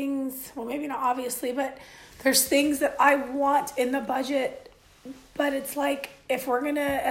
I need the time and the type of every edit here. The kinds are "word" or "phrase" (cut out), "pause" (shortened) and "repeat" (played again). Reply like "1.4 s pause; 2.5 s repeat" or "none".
none